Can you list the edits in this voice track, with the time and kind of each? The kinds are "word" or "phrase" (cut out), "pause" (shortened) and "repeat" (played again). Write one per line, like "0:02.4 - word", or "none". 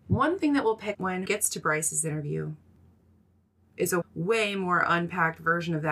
0:00.9 - word
0:01.3 - word
0:04.0 - word